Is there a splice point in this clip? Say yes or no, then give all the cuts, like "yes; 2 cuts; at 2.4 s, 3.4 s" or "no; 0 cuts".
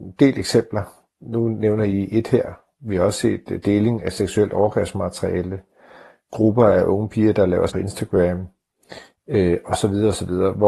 yes; 1 cut; at 7.7 s